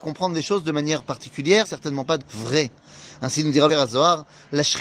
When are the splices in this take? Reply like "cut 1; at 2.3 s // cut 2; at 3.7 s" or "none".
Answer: cut 1; at 1.6 s // cut 2; at 2.2 s // cut 3; at 3.7 s